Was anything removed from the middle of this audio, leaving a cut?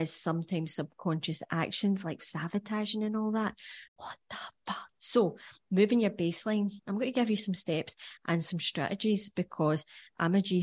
yes; 3 cuts; at 2.2 s, 3.9 s, 4.9 s

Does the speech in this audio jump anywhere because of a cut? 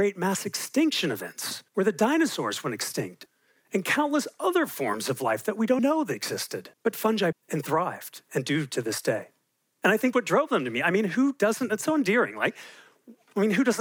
yes; 6 cuts; at 1.7 s, 5.8 s, 6.7 s, 7.3 s, 9.5 s, 10.1 s

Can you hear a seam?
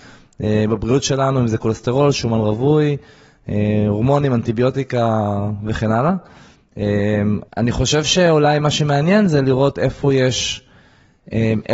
yes; 1 cut; at 7.5 s

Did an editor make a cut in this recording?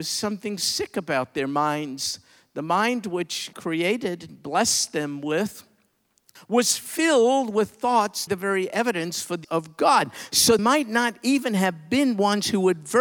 yes; 5 cuts; at 3.5 s, 6.4 s, 8.3 s, 9.4 s, 10.6 s

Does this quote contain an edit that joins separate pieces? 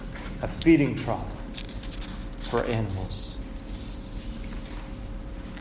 no; 0 cuts

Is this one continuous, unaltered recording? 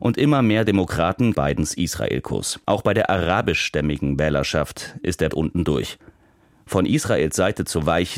no; 3 cuts; at 1.3 s, 2.6 s, 5.3 s

